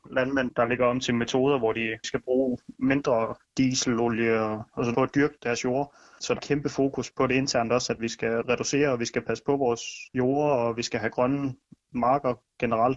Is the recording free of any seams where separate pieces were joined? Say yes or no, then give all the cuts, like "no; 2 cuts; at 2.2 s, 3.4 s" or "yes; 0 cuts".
no; 2 cuts; at 4.9 s, 6.4 s